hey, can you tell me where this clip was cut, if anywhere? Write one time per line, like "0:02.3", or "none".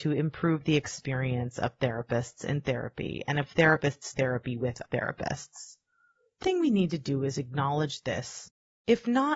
0:04.1
0:04.8
0:06.4

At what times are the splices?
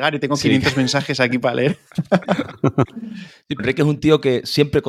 0:03.6

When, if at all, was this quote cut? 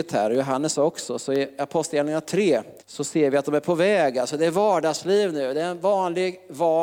0:02.8

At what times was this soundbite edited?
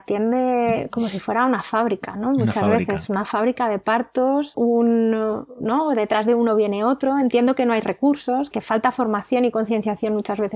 0:04.5
0:08.5

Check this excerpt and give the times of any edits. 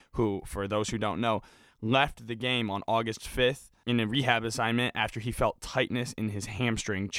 0:03.8

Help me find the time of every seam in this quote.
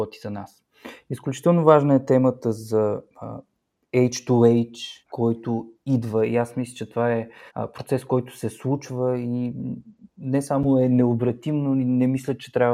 0:03.1
0:05.0
0:07.5

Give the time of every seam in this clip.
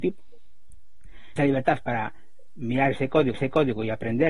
0:01.4
0:03.3

